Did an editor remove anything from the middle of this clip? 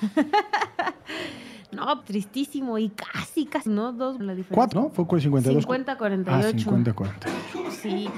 yes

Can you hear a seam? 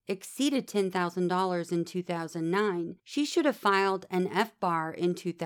yes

